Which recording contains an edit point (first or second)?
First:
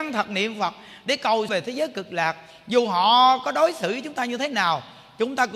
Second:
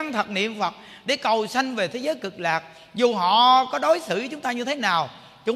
first